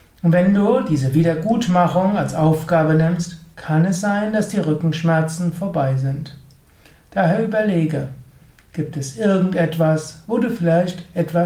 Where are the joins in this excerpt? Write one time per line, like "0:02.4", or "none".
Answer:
none